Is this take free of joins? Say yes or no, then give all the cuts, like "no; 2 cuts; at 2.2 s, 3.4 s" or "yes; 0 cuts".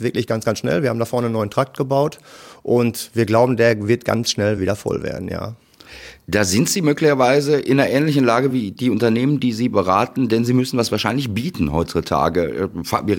yes; 0 cuts